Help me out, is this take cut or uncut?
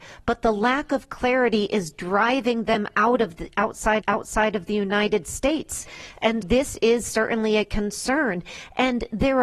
cut